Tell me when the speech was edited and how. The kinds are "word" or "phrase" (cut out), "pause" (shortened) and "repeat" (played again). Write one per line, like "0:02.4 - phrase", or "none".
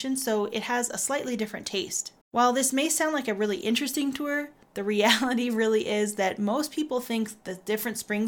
0:02.2 - pause

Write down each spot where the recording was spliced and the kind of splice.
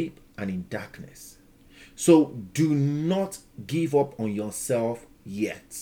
none

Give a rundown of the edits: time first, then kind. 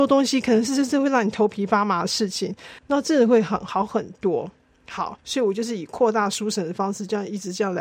0:02.8 - pause
0:05.2 - pause

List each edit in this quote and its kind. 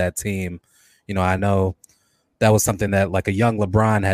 none

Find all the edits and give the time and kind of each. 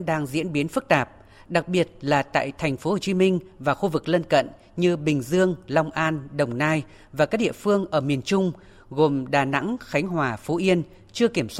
none

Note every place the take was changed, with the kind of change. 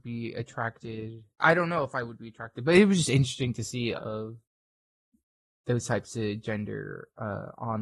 0:01.4 - word
0:04.0 - word

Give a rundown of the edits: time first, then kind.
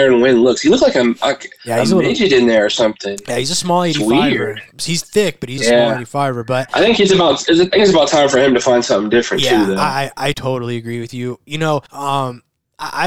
0:05.6 - word
0:10.3 - word
0:11.9 - pause

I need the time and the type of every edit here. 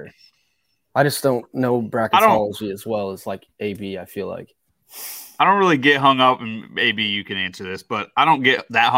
none

